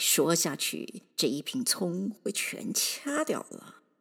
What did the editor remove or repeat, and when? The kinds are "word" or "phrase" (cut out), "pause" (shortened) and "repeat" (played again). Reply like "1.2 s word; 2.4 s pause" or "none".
1.1 s pause